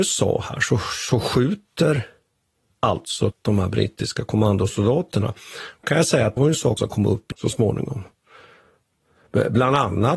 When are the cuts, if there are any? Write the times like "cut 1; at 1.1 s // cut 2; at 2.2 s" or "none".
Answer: cut 1; at 3.3 s // cut 2; at 5.8 s // cut 3; at 6.4 s // cut 4; at 6.8 s // cut 5; at 7.3 s